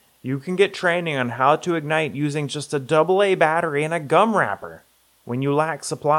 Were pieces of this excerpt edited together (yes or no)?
no